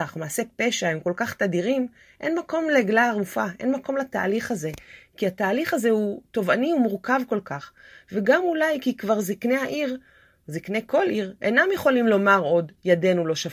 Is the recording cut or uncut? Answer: uncut